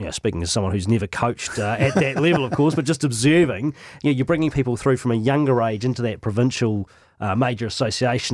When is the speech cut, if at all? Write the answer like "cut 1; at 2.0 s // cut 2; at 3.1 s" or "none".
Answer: none